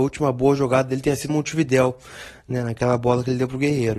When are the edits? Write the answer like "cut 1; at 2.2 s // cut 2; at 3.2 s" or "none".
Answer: cut 1; at 1.3 s